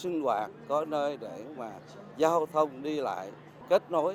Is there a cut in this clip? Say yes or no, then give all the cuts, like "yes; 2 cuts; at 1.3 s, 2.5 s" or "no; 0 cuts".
no; 0 cuts